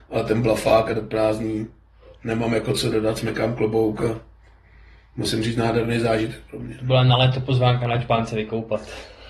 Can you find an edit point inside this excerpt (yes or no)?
no